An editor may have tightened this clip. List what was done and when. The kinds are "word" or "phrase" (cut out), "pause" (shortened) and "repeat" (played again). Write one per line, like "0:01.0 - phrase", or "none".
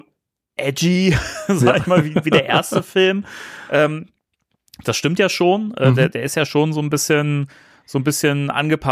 none